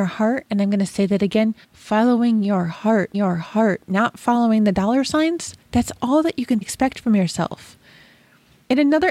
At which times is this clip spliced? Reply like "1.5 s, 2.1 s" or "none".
1.6 s, 3.1 s, 5.6 s, 6.6 s

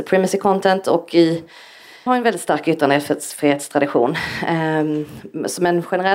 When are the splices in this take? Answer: 2.1 s

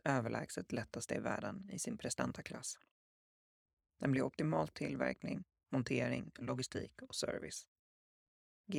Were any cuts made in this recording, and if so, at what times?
4.7 s

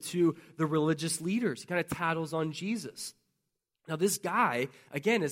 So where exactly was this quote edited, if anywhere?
none

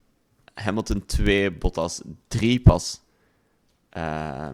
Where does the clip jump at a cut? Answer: none

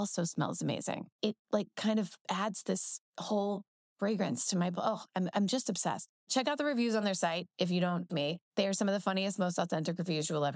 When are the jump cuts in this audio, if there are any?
8.1 s, 8.5 s

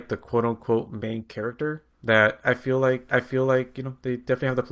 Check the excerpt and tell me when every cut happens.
1.9 s, 3.1 s

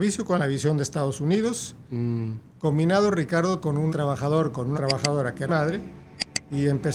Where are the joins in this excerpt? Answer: 3.6 s, 3.9 s, 4.7 s, 5.5 s

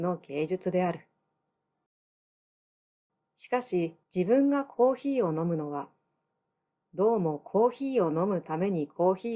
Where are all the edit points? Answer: 4.0 s

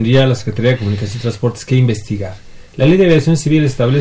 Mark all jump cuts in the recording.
none

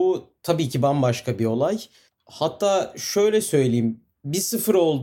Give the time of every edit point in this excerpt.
none

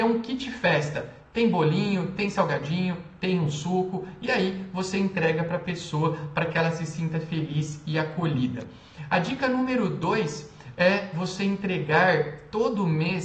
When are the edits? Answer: none

